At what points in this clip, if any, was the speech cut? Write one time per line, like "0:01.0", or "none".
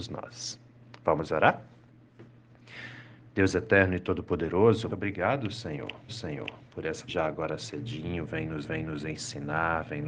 0:04.9
0:06.1
0:07.1
0:08.6